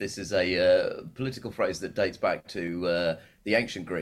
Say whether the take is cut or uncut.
uncut